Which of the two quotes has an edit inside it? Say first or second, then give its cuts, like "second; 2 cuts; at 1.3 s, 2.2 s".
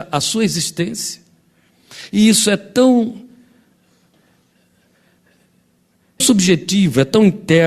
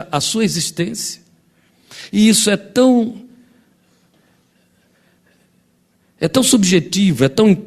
first; 1 cut; at 6.2 s